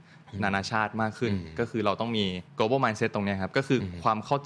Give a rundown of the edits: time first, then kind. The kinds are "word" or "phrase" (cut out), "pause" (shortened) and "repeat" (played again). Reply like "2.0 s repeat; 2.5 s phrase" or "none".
2.5 s pause